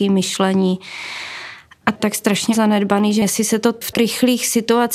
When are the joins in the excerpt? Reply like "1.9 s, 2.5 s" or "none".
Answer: 2.0 s, 3.2 s, 3.9 s